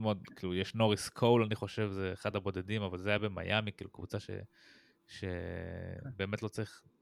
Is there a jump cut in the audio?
no; 0 cuts

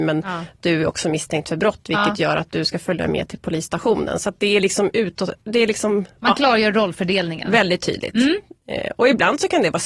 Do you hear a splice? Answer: no; 0 cuts

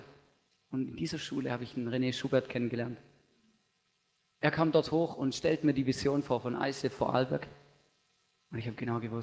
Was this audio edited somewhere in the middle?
no; 0 cuts

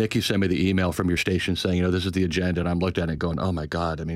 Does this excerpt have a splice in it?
no; 0 cuts

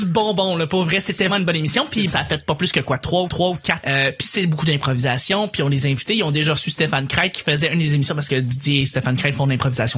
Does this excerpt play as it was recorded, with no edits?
no; 4 cuts; at 1.3 s, 2.1 s, 3.3 s, 3.8 s

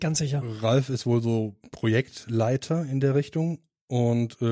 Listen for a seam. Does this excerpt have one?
no; 0 cuts

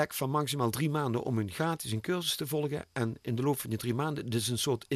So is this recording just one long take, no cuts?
yes; 0 cuts

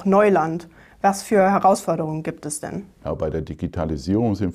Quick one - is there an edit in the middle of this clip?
no; 0 cuts

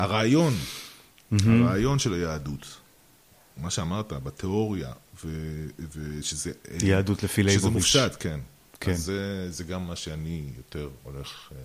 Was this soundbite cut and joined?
no; 0 cuts

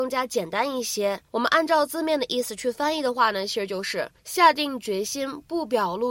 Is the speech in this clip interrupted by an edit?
yes; 2 cuts; at 1.3 s, 4.2 s

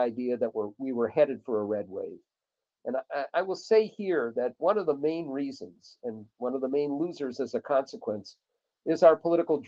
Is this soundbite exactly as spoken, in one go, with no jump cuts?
yes; 0 cuts

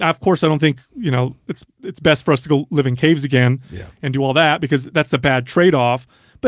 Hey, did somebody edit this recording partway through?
no; 0 cuts

